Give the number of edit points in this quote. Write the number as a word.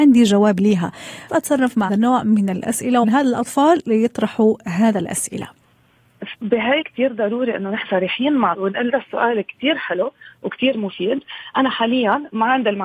eight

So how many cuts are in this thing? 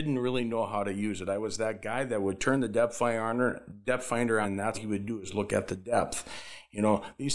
two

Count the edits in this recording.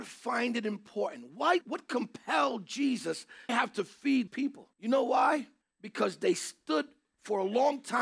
five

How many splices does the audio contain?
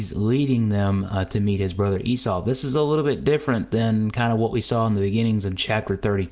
zero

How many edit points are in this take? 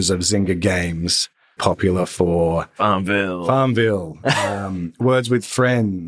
one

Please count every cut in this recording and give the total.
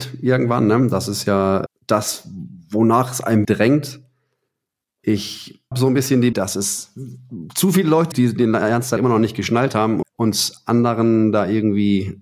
seven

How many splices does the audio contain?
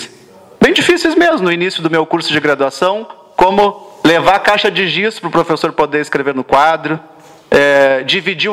zero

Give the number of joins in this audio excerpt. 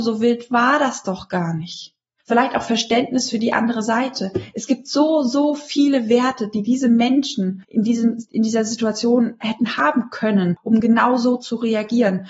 zero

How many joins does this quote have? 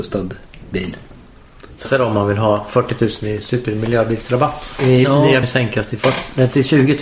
three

